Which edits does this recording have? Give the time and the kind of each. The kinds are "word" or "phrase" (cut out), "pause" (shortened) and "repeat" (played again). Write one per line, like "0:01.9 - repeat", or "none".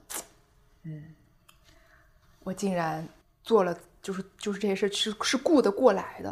0:03.2 - pause